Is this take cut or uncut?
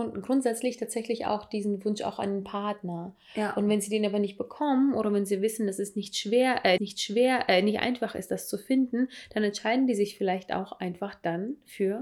cut